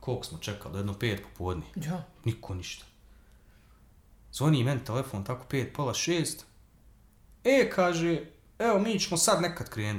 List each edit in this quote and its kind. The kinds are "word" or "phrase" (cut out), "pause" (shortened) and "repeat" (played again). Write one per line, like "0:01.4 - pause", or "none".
none